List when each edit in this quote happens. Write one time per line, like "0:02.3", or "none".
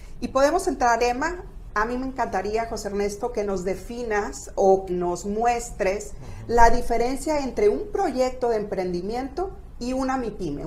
0:01.0
0:04.9